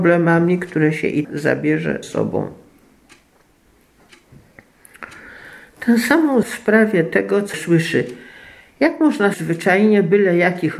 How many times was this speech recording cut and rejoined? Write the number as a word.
five